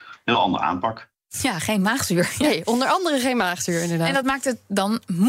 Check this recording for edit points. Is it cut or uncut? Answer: uncut